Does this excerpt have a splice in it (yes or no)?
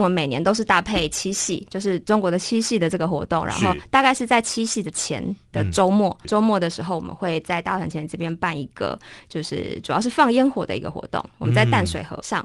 yes